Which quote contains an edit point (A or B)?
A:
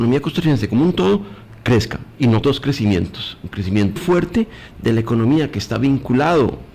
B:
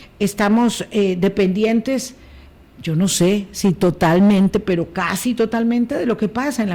A